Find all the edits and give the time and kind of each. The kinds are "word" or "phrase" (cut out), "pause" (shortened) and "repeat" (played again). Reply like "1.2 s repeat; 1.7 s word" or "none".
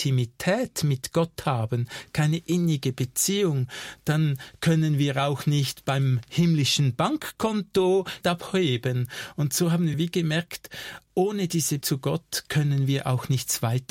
8.2 s word; 9.9 s word; 11.8 s word